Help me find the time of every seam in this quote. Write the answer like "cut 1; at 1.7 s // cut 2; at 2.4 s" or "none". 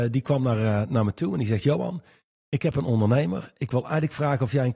none